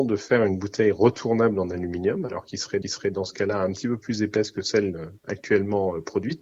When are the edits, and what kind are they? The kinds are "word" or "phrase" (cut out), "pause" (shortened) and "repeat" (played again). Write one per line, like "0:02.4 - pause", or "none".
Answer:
0:02.8 - repeat